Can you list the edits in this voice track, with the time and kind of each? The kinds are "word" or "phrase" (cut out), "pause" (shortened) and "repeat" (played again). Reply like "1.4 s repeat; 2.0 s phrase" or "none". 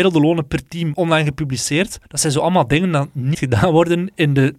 0.9 s word; 2.0 s pause; 3.3 s word